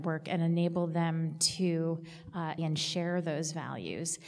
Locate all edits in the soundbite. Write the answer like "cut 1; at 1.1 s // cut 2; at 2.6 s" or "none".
cut 1; at 2.6 s